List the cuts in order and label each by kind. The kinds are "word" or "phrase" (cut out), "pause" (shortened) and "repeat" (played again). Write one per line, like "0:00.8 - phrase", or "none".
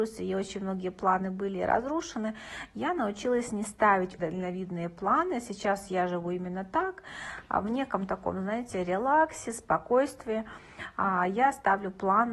0:04.2 - word